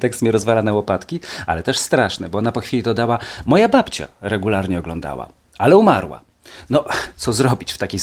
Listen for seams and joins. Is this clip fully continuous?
yes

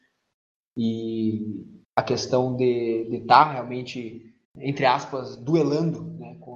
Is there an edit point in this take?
yes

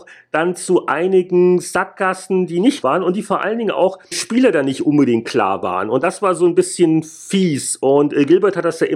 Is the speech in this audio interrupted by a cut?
yes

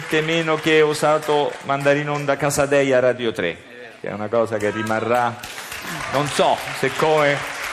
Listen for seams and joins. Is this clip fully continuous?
yes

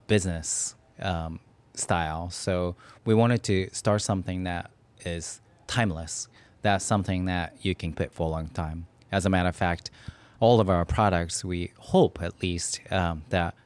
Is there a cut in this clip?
yes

